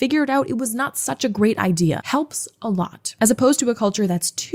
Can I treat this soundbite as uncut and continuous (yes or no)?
yes